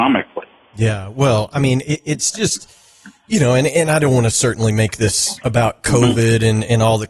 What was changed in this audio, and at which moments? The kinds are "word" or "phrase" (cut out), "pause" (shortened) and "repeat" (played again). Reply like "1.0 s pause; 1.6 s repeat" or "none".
5.4 s word